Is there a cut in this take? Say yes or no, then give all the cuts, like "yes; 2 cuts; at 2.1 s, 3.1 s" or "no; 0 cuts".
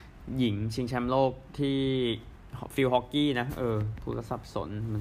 no; 0 cuts